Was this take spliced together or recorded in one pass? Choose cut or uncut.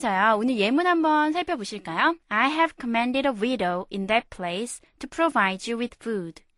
cut